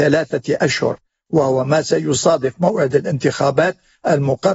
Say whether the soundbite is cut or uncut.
uncut